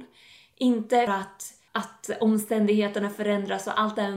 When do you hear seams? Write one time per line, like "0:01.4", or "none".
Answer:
0:01.1
0:01.7